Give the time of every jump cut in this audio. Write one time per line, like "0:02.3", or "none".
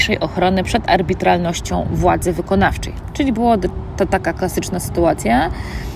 none